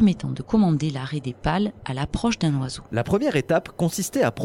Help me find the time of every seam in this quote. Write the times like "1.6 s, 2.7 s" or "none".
2.9 s